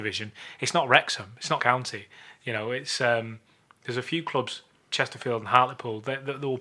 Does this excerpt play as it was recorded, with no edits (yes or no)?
no